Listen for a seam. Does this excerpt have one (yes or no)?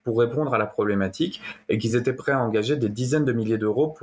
no